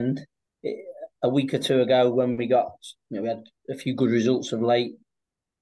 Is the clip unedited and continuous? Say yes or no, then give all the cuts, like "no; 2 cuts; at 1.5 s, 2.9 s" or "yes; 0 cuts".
yes; 0 cuts